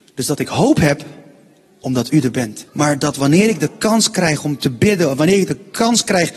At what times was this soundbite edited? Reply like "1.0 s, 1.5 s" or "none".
2.7 s